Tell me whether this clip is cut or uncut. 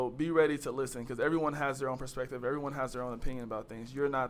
uncut